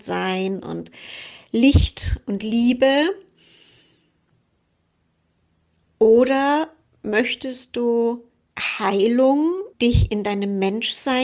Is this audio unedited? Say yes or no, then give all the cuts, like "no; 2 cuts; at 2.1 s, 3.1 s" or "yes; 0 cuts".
yes; 0 cuts